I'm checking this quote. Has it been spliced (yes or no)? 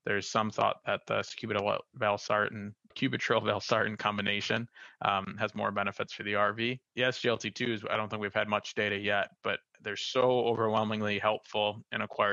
yes